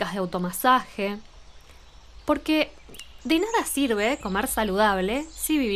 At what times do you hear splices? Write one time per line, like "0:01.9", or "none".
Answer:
none